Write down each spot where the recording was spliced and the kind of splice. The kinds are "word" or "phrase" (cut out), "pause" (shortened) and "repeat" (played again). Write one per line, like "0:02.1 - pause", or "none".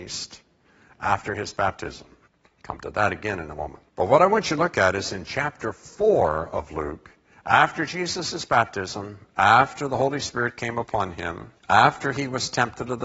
0:02.3 - pause
0:03.9 - pause
0:07.3 - pause
0:11.6 - pause